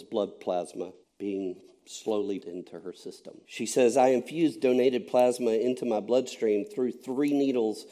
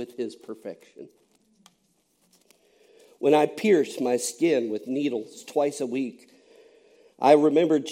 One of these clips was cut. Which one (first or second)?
first